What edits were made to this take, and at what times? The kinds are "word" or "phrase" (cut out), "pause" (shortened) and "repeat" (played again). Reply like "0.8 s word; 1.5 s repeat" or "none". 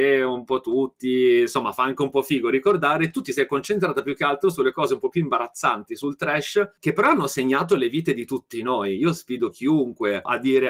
none